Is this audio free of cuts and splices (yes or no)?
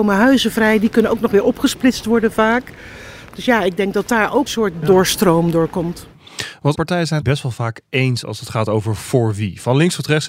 no